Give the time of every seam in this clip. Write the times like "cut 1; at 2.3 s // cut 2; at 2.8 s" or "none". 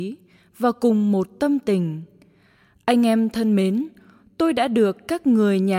none